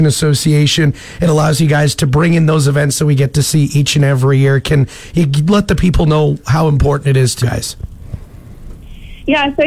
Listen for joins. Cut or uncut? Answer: cut